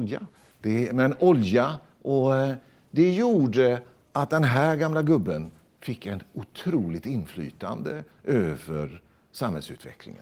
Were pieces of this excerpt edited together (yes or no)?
no